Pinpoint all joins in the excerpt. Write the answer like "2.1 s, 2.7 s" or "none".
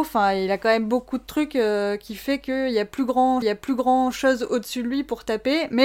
3.4 s